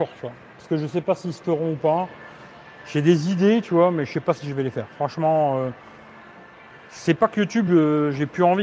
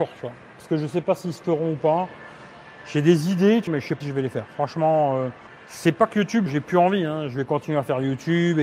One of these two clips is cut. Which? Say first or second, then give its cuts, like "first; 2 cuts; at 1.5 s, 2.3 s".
second; 4 cuts; at 3.7 s, 4.0 s, 5.5 s, 6.5 s